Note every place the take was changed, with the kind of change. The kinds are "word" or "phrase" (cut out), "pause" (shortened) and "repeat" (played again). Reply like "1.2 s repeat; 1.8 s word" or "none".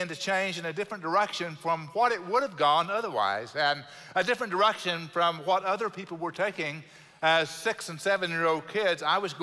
none